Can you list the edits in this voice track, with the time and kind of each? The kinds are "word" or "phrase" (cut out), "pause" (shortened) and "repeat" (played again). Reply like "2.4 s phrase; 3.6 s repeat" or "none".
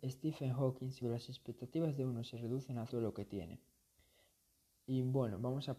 1.0 s word; 2.9 s phrase